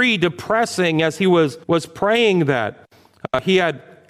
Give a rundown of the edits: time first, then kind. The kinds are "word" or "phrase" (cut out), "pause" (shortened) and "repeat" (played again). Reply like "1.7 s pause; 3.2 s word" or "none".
1.6 s pause

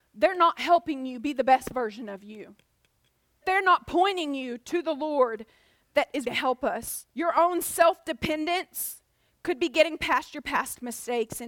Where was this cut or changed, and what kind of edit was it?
3.4 s word; 6.2 s phrase; 7.1 s pause

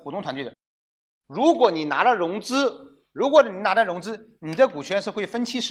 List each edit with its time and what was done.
3.1 s pause

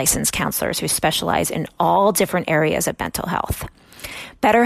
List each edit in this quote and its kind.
none

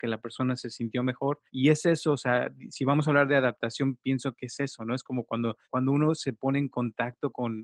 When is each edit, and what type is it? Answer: 1.5 s pause; 5.6 s pause

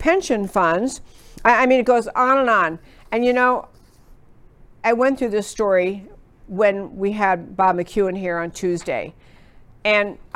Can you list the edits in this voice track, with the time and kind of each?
4.8 s word

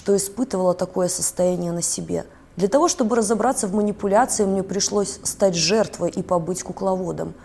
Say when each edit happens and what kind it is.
2.3 s pause

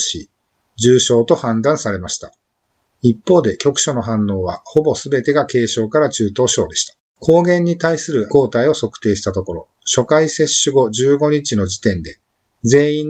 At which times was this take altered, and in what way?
7.0 s pause; 8.3 s word

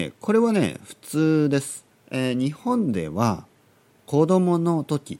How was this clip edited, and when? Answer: 1.9 s pause

